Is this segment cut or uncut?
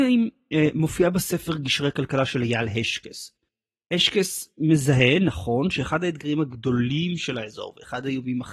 uncut